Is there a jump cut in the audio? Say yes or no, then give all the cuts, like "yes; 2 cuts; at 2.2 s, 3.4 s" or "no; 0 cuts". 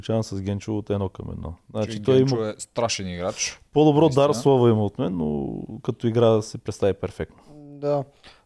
no; 0 cuts